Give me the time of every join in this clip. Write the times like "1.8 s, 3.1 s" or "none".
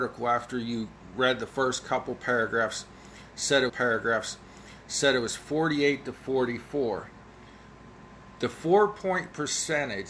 3.7 s